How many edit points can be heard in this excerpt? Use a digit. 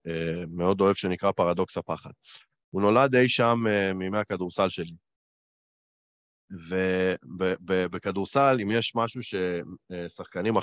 0